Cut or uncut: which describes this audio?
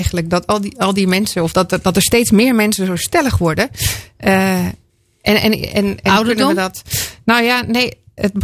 uncut